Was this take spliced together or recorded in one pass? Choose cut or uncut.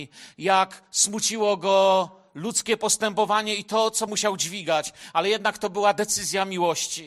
cut